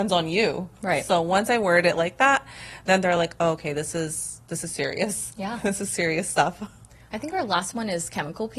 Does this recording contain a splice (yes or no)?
no